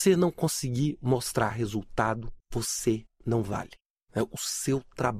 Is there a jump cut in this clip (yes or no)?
yes